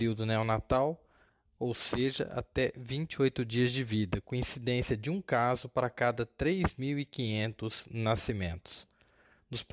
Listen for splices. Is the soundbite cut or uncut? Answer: uncut